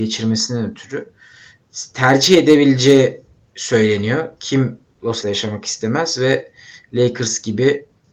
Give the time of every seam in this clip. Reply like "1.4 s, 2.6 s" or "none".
5.2 s

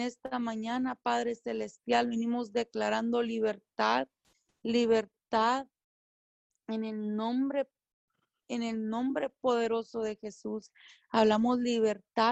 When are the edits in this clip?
none

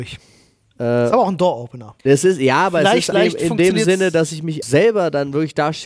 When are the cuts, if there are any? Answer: 2.0 s, 3.1 s, 4.6 s

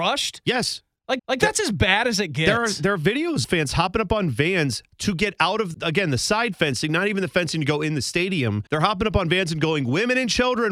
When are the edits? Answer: 1.2 s, 3.4 s, 5.7 s, 8.7 s

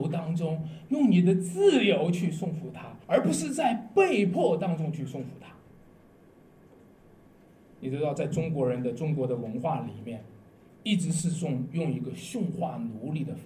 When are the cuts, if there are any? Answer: 3.0 s

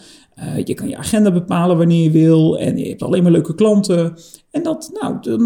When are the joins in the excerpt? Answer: none

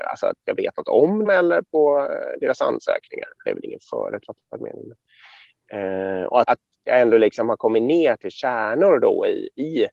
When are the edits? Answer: 1.3 s, 6.4 s

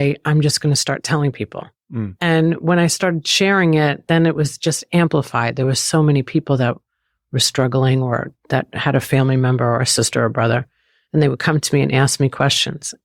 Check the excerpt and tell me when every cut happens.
none

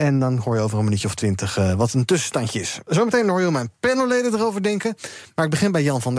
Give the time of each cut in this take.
none

